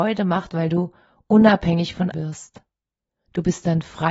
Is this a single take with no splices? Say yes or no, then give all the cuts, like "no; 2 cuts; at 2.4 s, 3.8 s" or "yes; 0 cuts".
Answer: no; 1 cut; at 2.1 s